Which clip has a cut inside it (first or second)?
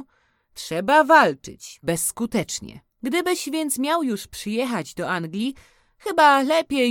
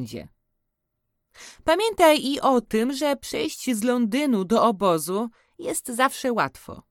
first